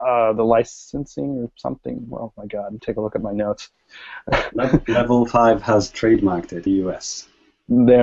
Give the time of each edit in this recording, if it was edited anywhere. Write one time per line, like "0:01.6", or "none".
0:02.8
0:06.7